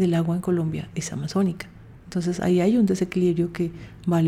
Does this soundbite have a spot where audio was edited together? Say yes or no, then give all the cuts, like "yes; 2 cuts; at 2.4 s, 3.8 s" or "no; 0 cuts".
yes; 1 cut; at 0.9 s